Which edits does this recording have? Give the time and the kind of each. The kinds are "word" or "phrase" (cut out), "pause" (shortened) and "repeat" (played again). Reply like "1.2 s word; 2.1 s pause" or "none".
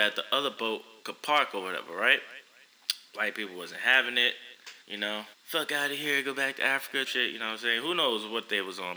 4.8 s pause; 5.3 s pause; 7.0 s word